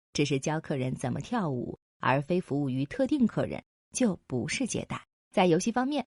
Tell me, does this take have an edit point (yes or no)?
no